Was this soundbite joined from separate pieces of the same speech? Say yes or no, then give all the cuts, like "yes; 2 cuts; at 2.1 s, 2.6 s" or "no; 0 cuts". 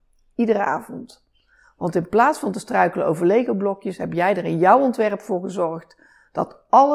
no; 0 cuts